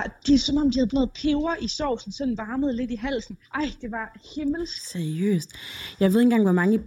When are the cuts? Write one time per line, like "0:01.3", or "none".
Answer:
0:00.9
0:02.4
0:03.4